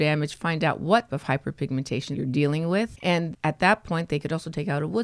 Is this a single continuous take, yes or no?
no